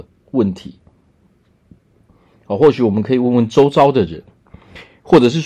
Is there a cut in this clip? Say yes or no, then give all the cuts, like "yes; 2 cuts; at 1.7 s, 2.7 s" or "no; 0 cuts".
no; 0 cuts